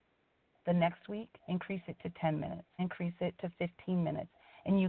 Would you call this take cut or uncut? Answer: cut